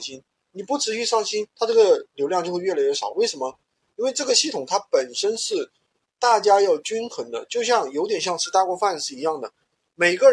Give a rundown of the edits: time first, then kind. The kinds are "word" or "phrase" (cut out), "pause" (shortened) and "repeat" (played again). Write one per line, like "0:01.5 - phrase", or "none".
0:01.5 - pause